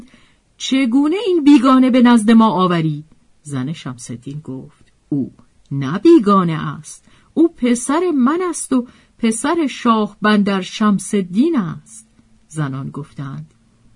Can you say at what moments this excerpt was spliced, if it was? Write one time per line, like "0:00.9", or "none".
none